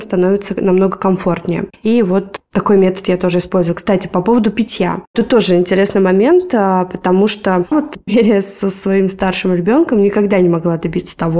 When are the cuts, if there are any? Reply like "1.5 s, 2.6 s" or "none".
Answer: 7.7 s, 8.1 s